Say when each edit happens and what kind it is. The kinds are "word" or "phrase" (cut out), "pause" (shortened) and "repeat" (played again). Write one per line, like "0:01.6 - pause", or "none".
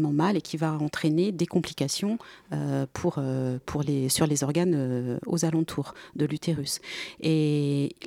none

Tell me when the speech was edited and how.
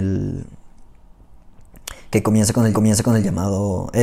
0:02.7 - repeat

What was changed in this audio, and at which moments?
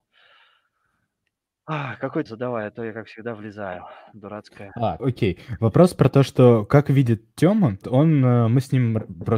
0:02.3 - word
0:05.0 - word
0:07.8 - word

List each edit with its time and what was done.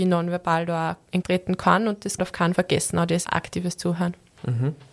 0:01.2 - word
0:02.2 - word
0:02.5 - word
0:03.2 - word

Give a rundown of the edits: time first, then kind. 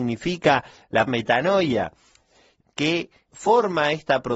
0:01.1 - word
0:02.6 - phrase
0:03.3 - word

